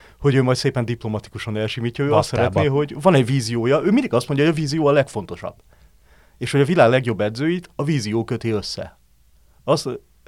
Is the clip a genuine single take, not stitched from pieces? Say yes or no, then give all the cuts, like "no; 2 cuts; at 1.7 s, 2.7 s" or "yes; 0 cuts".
yes; 0 cuts